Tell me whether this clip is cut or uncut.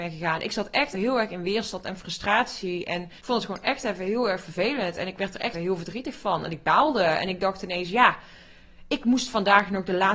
cut